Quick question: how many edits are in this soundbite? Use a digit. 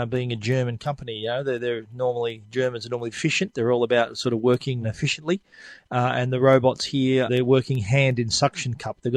3